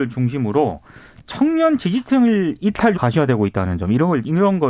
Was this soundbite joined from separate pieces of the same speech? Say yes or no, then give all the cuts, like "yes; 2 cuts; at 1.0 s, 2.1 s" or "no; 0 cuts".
yes; 1 cut; at 2.9 s